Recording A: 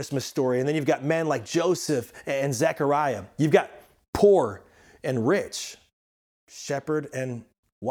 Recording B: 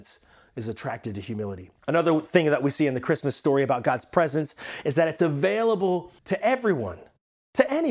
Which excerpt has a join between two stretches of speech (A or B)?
B